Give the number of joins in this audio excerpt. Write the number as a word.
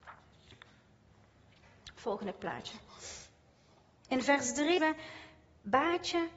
one